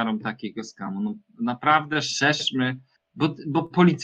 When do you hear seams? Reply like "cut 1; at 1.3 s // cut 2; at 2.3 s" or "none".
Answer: none